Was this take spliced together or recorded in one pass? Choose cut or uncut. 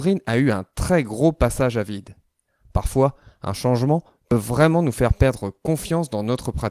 uncut